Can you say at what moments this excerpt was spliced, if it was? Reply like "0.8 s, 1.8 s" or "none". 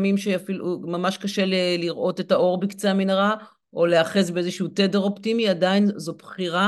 none

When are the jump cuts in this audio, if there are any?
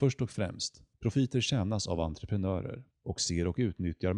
0.9 s, 2.9 s

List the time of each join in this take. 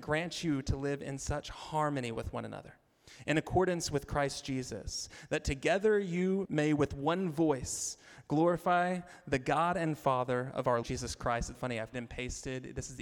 6.5 s, 10.8 s, 11.5 s, 11.9 s

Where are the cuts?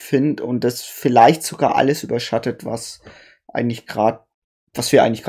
none

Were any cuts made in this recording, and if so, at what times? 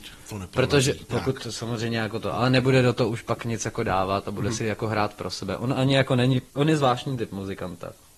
6.5 s

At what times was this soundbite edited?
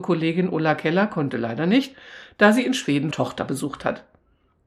3.1 s

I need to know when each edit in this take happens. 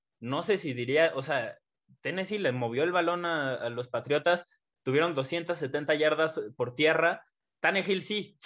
none

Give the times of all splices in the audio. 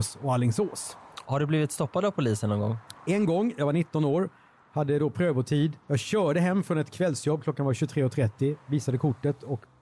5.8 s

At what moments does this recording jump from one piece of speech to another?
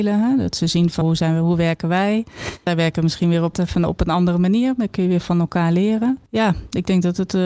1.0 s, 3.5 s

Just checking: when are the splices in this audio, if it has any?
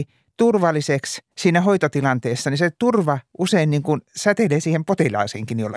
1.3 s

